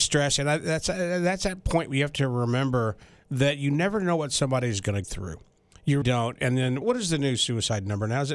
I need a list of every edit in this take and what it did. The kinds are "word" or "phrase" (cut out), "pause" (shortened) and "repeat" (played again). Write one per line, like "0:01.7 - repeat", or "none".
0:05.0 - word
0:06.0 - word
0:06.8 - word